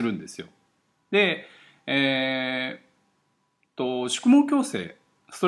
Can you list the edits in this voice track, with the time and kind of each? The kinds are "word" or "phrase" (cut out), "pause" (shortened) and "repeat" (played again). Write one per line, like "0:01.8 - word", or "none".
none